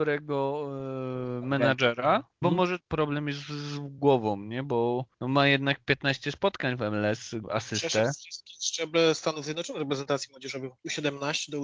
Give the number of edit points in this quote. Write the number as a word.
four